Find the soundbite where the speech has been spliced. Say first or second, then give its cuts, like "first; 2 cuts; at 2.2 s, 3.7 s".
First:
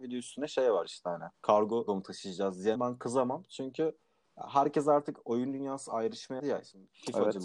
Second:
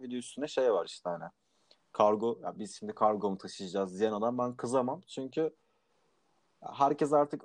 first; 5 cuts; at 1.3 s, 1.9 s, 2.8 s, 4.2 s, 6.4 s